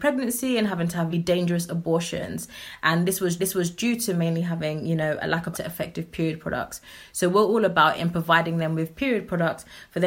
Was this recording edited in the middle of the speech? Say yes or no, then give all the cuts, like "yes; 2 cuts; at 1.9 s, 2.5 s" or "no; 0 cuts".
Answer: yes; 4 cuts; at 1.1 s, 3.4 s, 5.5 s, 8.0 s